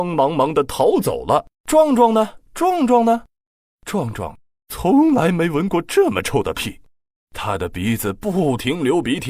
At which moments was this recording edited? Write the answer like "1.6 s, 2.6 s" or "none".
1.5 s, 2.5 s